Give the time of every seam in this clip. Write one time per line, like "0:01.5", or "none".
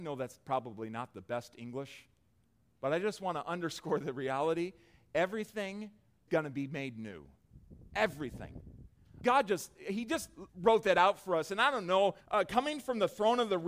0:06.3
0:09.2
0:10.5
0:12.2